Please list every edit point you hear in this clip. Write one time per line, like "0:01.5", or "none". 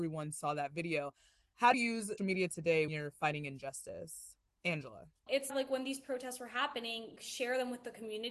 0:01.7
0:02.2
0:02.9
0:05.5
0:07.2